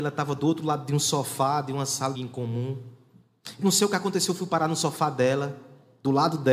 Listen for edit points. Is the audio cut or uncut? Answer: cut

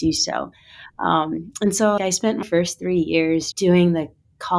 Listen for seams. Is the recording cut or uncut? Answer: cut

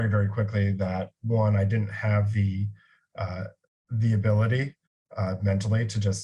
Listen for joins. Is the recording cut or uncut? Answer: uncut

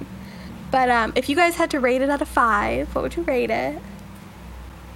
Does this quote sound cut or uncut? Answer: uncut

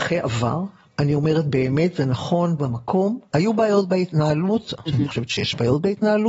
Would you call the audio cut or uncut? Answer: cut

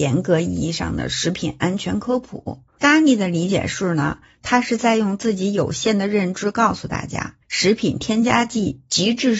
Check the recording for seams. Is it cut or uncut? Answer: cut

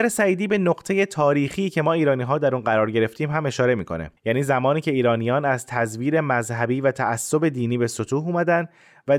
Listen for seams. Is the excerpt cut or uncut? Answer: cut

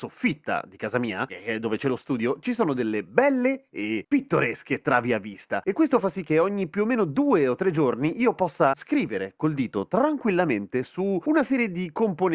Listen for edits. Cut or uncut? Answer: uncut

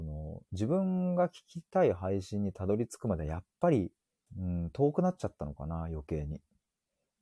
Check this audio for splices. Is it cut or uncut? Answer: cut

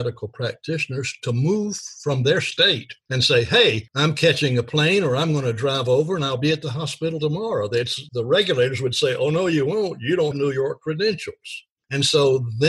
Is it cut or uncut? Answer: cut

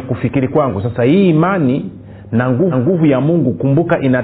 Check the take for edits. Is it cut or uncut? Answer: cut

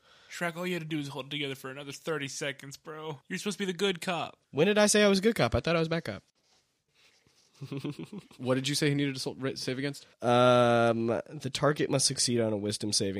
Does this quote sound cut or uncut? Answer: cut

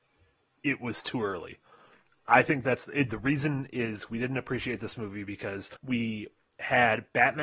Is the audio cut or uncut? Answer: cut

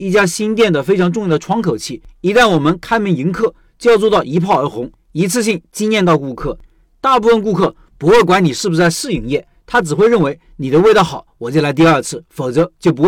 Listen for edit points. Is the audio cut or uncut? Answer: uncut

